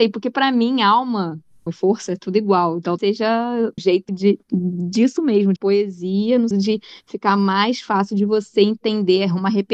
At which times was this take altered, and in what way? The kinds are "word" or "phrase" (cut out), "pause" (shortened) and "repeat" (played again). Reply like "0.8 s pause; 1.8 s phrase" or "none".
1.7 s word; 3.0 s word; 3.8 s word; 4.1 s word; 5.6 s word; 6.5 s word